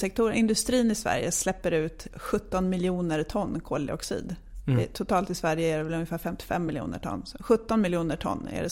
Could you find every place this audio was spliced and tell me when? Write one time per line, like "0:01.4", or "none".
none